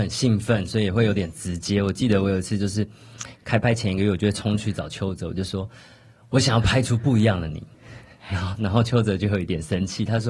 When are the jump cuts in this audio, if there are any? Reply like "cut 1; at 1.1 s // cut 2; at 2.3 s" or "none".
cut 1; at 5.8 s // cut 2; at 7.7 s